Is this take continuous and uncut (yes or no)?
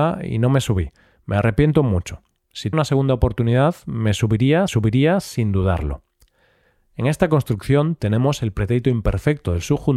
no